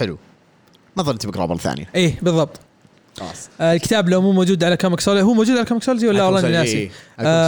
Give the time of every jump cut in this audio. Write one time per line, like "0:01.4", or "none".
none